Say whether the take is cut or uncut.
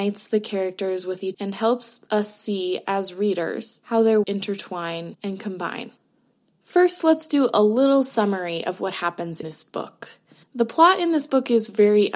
cut